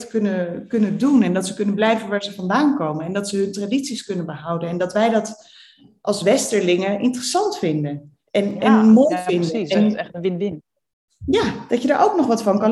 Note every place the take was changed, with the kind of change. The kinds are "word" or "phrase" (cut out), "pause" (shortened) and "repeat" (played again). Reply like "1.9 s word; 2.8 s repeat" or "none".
none